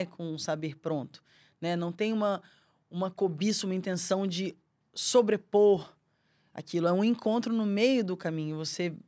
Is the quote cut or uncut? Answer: uncut